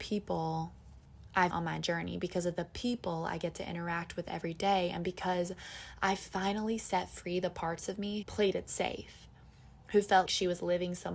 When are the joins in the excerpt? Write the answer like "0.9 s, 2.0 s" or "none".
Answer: 1.5 s, 8.2 s, 10.3 s

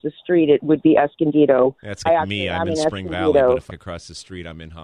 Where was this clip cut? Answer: 2.1 s, 3.7 s

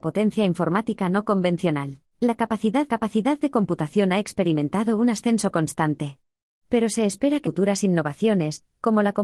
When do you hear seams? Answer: 2.1 s, 2.9 s, 7.4 s

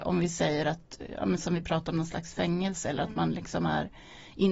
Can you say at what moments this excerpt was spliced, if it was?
none

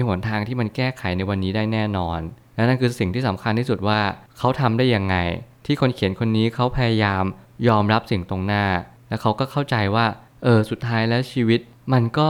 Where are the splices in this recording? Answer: none

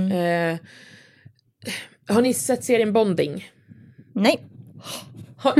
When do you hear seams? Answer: none

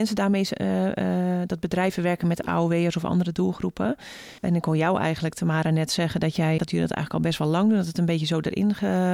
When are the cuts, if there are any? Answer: 4.4 s, 6.6 s

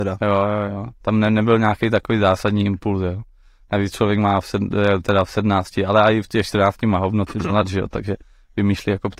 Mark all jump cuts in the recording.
none

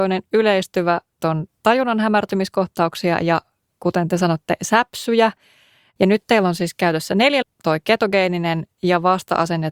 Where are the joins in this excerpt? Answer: 1.2 s, 7.4 s

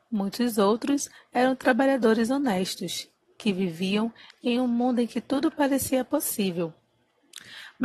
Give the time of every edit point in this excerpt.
none

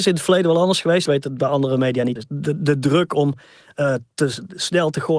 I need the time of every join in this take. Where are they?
1.1 s, 2.2 s

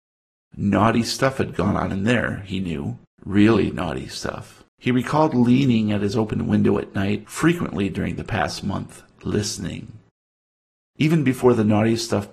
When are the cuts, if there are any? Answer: 3.0 s, 4.7 s

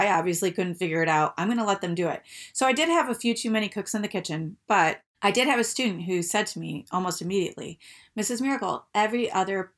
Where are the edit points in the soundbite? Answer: none

